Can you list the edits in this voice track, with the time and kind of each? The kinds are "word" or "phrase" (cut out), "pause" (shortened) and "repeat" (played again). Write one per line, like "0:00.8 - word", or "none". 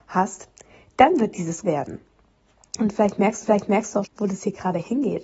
0:01.6 - phrase
0:03.4 - repeat
0:04.0 - word

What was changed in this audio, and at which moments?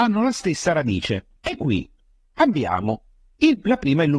0:01.4 - pause

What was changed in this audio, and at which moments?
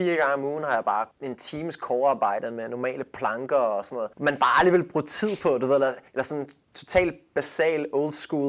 0:01.1 - pause
0:04.1 - pause
0:06.1 - pause

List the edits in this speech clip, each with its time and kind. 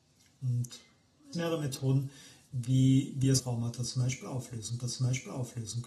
0:01.3 - phrase
0:03.4 - phrase
0:04.8 - repeat

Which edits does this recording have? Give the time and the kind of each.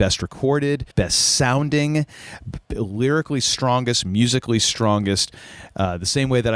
0:00.9 - pause

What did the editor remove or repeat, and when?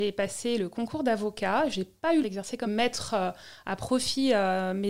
0:02.2 - word
0:02.6 - phrase

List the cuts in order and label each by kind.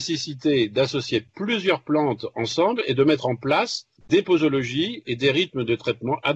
0:04.0 - pause

